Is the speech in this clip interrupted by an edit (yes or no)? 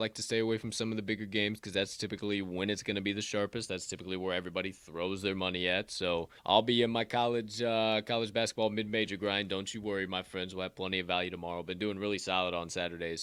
yes